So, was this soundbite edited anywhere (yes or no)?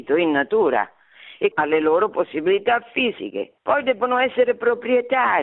yes